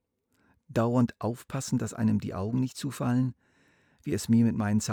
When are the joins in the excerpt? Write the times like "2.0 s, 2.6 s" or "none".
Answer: none